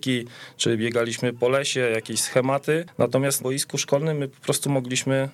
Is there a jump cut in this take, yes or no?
yes